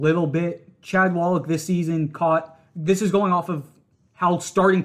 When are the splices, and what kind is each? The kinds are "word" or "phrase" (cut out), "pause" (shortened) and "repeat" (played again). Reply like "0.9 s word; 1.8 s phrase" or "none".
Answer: none